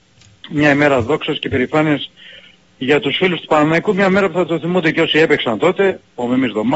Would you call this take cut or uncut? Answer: uncut